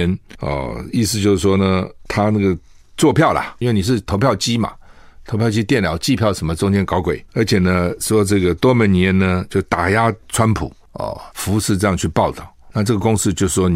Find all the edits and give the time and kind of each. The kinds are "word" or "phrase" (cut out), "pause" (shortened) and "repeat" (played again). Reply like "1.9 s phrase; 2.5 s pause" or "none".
7.3 s pause; 11.3 s pause